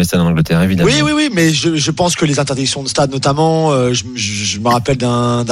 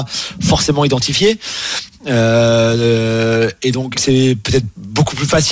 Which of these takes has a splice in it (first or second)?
second